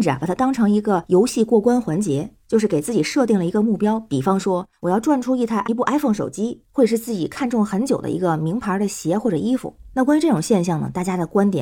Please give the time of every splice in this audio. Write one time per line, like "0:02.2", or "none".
0:05.6